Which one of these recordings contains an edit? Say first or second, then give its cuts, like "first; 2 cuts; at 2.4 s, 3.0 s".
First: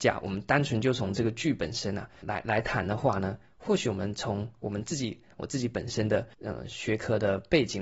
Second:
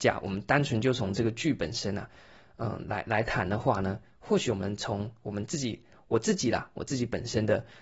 first; 3 cuts; at 2.2 s, 5.3 s, 6.3 s